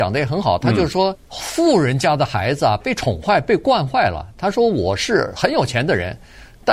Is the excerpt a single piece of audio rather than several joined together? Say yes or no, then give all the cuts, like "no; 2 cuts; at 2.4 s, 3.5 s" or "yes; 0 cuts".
no; 1 cut; at 1.1 s